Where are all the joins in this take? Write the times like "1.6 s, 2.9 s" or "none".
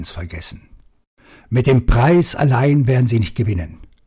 1.1 s

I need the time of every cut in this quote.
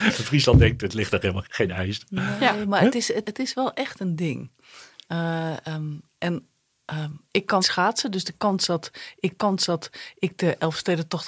1.4 s, 3.2 s, 7.6 s, 9.4 s

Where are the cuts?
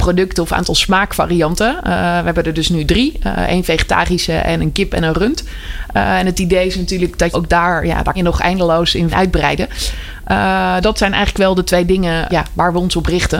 7.3 s, 8.1 s, 9.1 s, 10.8 s, 12.3 s

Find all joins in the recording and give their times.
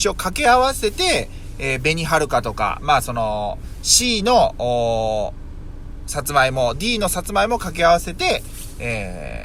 none

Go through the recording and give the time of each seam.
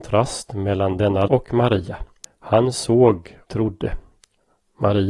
1.3 s, 2.2 s, 3.5 s

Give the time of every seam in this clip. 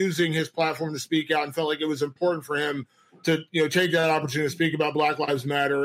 none

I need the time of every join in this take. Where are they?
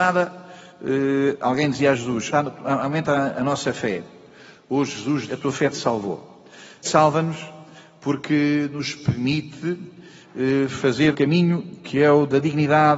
2.3 s, 5.3 s, 6.8 s, 11.1 s

